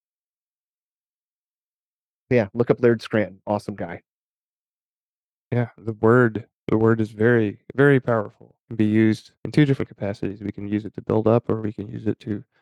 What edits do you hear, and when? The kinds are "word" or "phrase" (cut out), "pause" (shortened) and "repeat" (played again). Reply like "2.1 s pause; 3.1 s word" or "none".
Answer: 8.6 s pause; 9.4 s pause